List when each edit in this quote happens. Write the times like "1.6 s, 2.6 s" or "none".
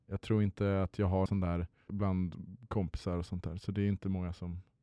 1.3 s, 1.9 s